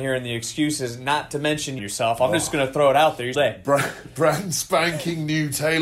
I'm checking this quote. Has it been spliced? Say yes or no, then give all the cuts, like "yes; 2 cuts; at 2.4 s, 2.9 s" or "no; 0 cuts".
yes; 2 cuts; at 1.8 s, 3.3 s